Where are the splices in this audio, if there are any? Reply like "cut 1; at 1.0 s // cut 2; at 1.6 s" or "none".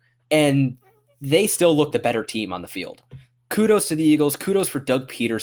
cut 1; at 1.9 s